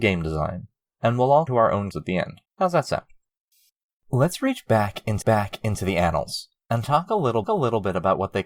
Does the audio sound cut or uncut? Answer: cut